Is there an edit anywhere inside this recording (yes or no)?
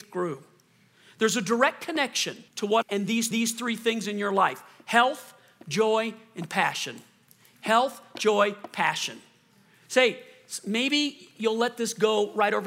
yes